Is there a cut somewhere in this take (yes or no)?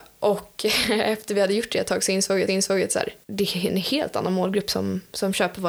yes